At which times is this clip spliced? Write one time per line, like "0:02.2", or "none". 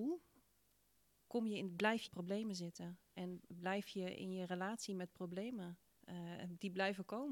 0:01.3
0:02.1
0:05.9